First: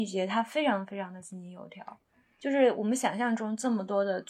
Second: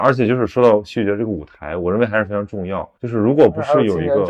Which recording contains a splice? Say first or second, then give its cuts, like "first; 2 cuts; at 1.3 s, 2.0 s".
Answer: second; 1 cut; at 2.9 s